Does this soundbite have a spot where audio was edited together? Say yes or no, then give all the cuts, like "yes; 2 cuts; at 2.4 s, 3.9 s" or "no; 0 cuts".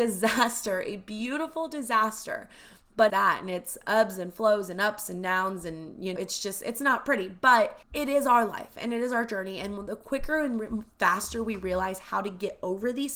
yes; 3 cuts; at 3.1 s, 6.2 s, 7.8 s